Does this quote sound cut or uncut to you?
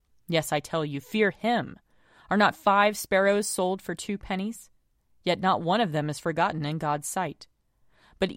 uncut